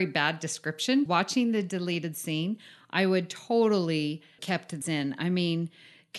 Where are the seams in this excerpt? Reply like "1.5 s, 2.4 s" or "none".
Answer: 1.1 s, 4.4 s, 4.8 s

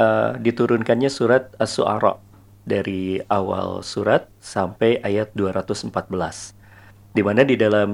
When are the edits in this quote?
none

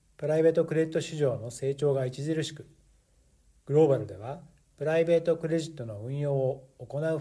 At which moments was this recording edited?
none

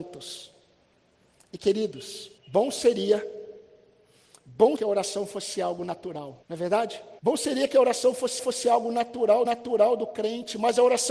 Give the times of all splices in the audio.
2.4 s, 4.8 s, 6.4 s, 7.2 s, 8.4 s, 9.5 s

